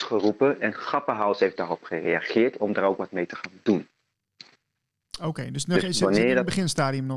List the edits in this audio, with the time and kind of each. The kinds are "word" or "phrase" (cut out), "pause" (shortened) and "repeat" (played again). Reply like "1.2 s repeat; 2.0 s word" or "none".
none